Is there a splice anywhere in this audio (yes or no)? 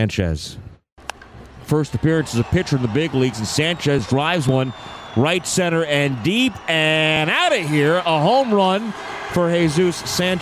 no